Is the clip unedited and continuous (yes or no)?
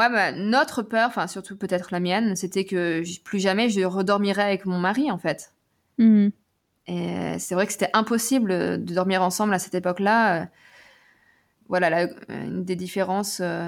yes